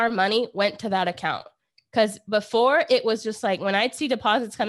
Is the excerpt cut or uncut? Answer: uncut